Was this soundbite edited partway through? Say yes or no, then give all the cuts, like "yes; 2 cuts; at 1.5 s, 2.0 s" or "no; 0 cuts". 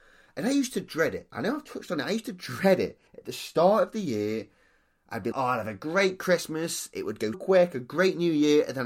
yes; 3 cuts; at 3.1 s, 5.3 s, 7.3 s